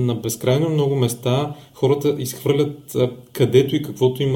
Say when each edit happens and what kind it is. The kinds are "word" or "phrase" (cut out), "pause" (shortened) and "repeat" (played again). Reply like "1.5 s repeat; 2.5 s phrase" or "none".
none